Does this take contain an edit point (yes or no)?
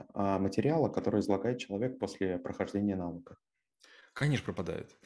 no